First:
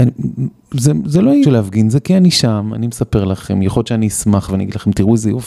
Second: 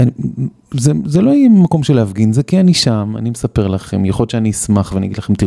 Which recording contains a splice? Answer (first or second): first